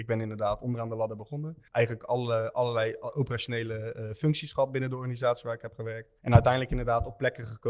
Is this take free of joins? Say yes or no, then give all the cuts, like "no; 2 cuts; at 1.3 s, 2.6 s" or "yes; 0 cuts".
no; 2 cuts; at 1.7 s, 6.2 s